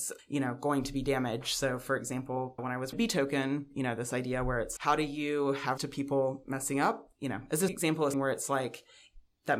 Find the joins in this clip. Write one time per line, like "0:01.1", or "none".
0:02.6
0:02.9
0:04.8
0:05.8
0:07.7
0:08.1

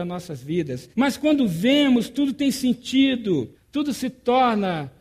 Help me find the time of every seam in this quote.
0:00.9
0:03.5

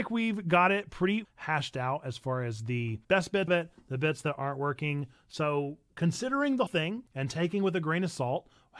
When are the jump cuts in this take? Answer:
0:01.2
0:03.0
0:03.5
0:06.7
0:07.1

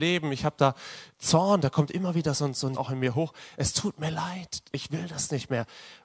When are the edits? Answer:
0:01.1
0:02.7

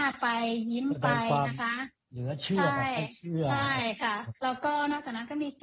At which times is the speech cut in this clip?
0:04.4

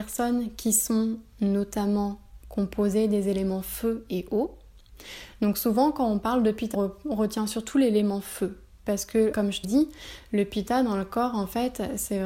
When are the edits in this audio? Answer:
0:06.7
0:09.3
0:09.6

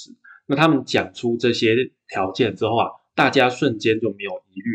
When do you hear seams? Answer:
none

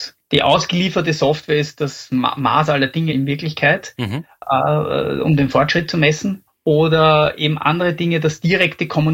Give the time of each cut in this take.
0:03.1
0:06.5

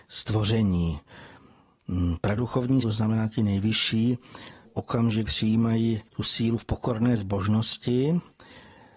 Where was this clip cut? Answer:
0:02.8
0:04.6
0:05.3
0:06.1

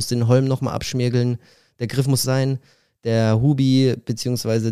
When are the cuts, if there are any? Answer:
0:02.2

